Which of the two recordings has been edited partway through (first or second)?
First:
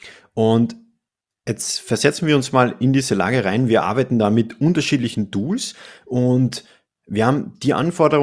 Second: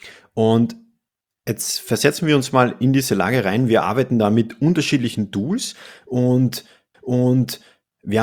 second